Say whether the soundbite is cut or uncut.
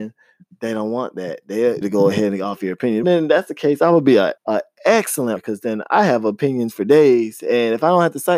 cut